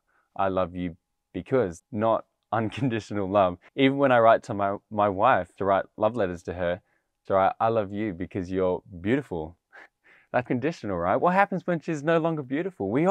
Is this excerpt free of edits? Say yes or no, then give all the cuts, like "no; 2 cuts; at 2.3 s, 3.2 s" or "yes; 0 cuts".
no; 6 cuts; at 1.8 s, 3.7 s, 5.6 s, 7.3 s, 9.9 s, 10.5 s